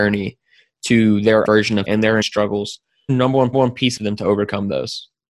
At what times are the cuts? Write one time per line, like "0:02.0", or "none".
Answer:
0:01.4
0:01.8
0:02.2
0:03.1
0:03.5
0:04.0